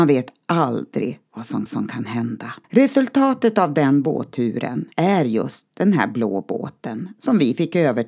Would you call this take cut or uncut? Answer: cut